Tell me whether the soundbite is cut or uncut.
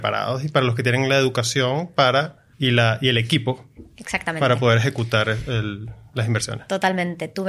cut